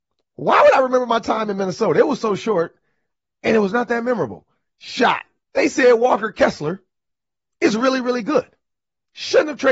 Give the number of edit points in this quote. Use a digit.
1